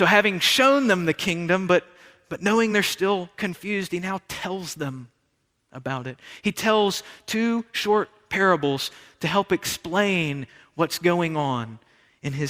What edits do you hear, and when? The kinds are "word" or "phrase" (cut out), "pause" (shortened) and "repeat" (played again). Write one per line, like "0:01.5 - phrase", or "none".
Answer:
none